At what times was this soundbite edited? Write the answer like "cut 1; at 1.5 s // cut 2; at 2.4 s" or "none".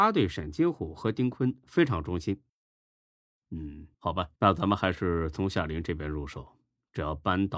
cut 1; at 3.9 s // cut 2; at 4.4 s